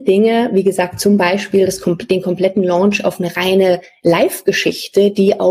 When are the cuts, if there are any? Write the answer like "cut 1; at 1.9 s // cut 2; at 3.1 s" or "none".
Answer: none